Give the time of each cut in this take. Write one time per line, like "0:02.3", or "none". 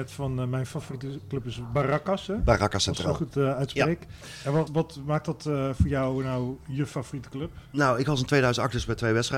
0:04.7